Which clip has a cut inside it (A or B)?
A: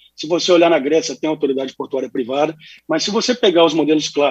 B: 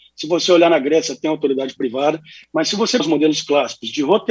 B